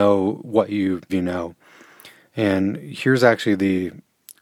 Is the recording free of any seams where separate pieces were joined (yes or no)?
no